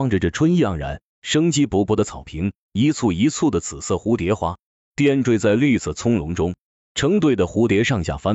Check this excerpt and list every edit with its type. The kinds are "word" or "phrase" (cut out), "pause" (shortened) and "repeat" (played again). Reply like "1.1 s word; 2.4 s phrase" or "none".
none